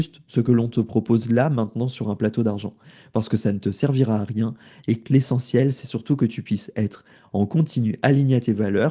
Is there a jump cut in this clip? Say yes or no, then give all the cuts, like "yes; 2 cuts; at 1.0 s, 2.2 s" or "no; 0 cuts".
no; 0 cuts